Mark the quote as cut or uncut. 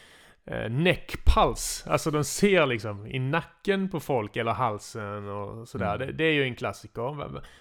uncut